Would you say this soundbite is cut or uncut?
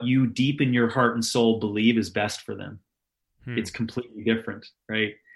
uncut